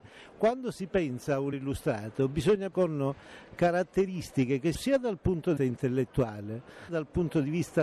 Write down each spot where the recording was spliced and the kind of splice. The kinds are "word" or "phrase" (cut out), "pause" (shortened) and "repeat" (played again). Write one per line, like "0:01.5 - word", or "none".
0:01.5 - word
0:02.7 - word
0:04.7 - word
0:05.6 - word
0:06.9 - word